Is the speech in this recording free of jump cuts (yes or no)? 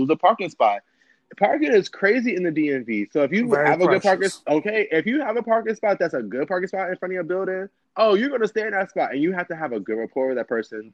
no